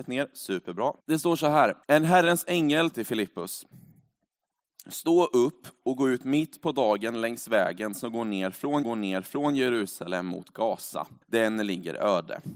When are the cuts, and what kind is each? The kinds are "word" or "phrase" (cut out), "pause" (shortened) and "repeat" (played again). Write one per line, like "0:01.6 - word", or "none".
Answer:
0:01.0 - pause
0:01.8 - pause
0:02.9 - word
0:08.8 - repeat
0:11.2 - pause